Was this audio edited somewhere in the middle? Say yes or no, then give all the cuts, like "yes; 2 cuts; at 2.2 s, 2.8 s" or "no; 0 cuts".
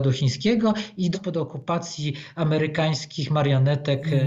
yes; 1 cut; at 1.1 s